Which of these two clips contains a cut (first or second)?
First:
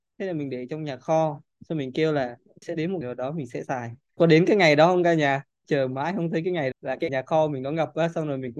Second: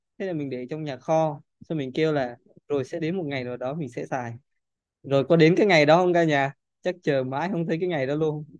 first